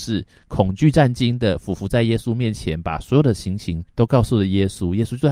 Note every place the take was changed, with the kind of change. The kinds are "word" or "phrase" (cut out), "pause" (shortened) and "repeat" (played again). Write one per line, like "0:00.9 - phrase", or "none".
0:03.9 - pause